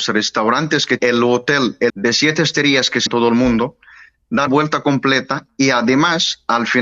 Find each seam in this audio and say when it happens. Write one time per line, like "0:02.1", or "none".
0:01.0
0:01.9
0:03.1
0:04.5